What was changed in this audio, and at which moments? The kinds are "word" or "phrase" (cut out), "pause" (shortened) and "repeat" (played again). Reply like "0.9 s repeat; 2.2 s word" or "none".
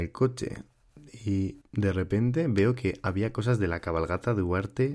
1.6 s pause